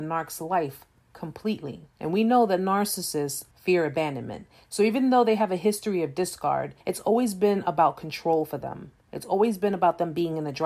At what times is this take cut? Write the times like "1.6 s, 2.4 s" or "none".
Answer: 1.9 s, 3.5 s, 6.8 s